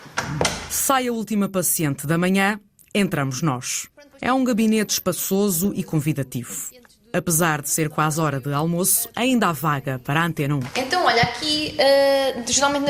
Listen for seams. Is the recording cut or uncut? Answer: uncut